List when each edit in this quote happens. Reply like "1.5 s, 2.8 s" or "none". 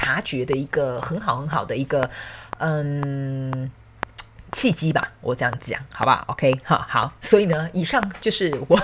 none